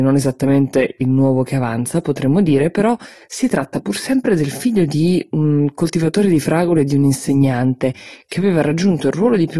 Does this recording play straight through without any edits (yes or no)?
yes